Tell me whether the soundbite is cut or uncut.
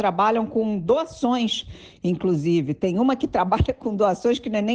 uncut